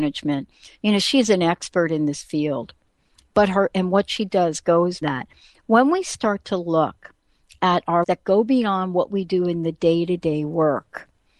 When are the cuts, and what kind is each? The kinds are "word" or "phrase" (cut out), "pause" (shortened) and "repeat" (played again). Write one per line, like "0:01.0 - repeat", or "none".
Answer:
0:03.7 - word
0:05.0 - word
0:08.0 - word